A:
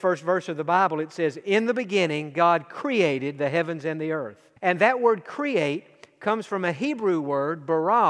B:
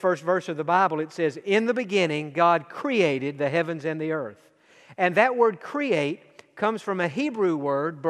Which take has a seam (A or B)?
A